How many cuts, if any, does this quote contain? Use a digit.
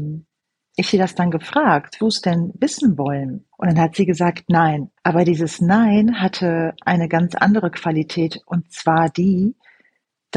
4